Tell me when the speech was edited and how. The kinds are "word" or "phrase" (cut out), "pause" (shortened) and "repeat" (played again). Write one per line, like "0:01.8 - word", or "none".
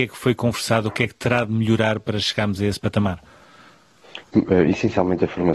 none